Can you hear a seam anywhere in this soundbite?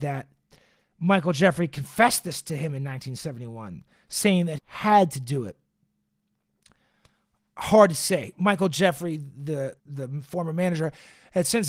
yes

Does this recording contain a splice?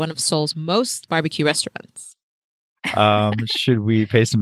yes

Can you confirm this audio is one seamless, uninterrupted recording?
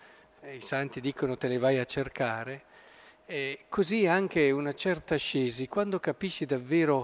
yes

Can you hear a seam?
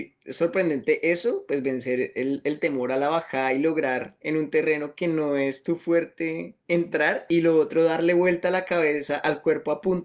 no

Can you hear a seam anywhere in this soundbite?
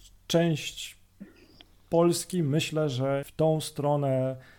yes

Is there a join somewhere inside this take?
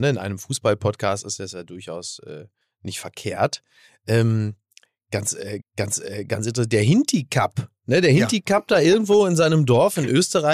yes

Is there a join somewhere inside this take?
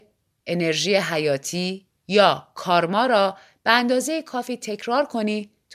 yes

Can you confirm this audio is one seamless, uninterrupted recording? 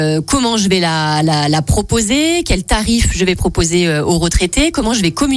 yes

